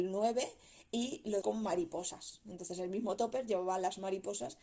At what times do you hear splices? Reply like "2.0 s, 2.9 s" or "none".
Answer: 1.4 s

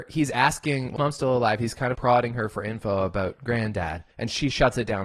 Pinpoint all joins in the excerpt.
1.0 s, 1.9 s, 4.1 s

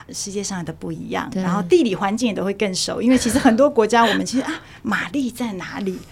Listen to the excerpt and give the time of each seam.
none

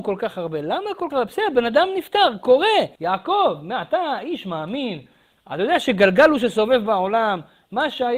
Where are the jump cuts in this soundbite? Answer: 1.1 s, 3.0 s

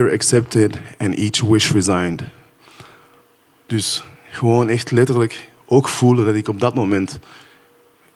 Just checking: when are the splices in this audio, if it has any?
none

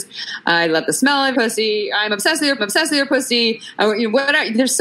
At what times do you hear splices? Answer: 1.3 s, 2.6 s

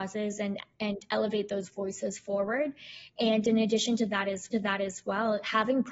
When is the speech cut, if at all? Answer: 4.5 s

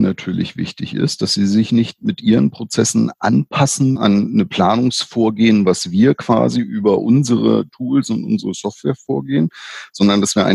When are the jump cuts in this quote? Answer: 4.0 s

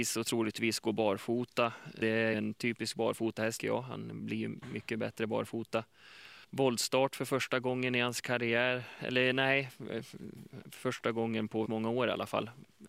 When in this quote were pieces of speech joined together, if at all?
2.0 s, 2.3 s, 3.6 s, 6.4 s, 11.7 s

